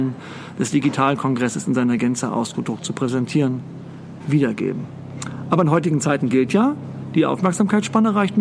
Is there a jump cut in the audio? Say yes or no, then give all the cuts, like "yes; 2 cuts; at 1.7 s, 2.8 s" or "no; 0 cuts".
no; 0 cuts